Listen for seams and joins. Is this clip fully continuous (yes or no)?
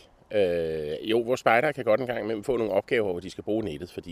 no